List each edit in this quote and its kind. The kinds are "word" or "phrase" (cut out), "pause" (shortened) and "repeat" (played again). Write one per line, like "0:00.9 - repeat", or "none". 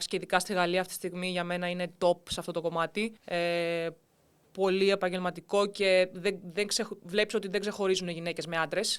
0:03.2 - pause